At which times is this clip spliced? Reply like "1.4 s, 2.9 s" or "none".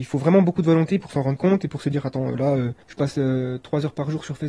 2.8 s